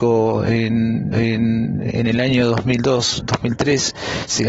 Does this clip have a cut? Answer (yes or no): yes